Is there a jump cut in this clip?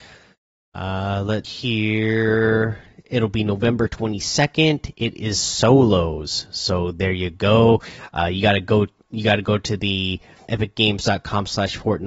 yes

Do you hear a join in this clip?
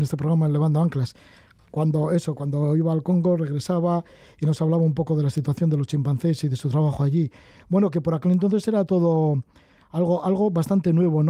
no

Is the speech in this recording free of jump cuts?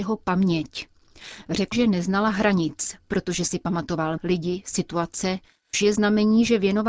no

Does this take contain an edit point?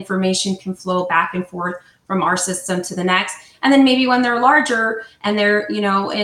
no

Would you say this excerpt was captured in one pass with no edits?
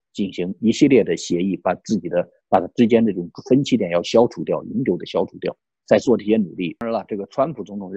yes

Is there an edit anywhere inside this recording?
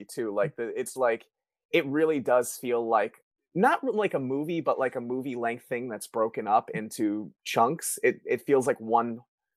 yes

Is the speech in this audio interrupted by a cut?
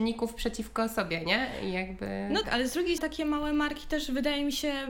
yes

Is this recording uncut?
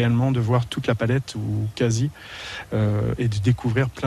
yes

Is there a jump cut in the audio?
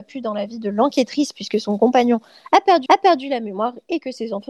yes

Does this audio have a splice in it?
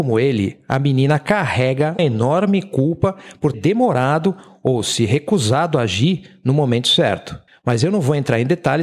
yes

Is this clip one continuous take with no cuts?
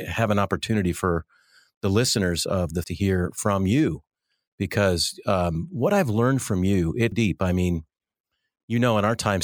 no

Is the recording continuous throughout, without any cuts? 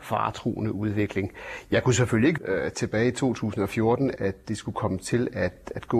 no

